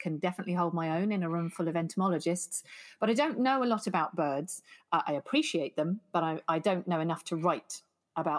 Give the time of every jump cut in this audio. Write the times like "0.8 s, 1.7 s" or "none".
none